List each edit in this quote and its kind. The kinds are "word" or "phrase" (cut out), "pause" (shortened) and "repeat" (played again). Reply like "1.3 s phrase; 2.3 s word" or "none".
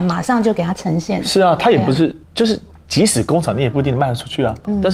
2.2 s pause